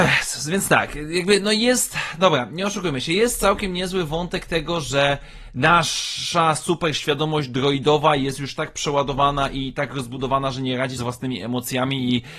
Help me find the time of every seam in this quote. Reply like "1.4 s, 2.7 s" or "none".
11.0 s